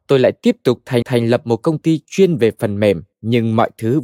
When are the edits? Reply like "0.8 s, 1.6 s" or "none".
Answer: 1.0 s, 3.1 s